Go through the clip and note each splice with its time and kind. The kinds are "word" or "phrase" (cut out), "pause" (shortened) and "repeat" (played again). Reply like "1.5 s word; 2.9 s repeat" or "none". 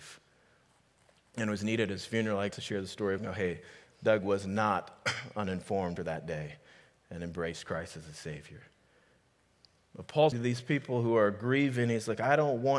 2.5 s word; 3.2 s word; 6.0 s word; 10.3 s word